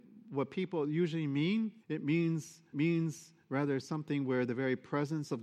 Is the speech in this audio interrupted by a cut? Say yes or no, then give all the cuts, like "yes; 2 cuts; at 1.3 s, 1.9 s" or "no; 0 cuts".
yes; 2 cuts; at 1.8 s, 2.7 s